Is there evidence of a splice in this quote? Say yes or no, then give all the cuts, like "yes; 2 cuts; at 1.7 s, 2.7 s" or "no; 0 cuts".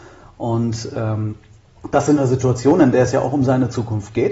no; 0 cuts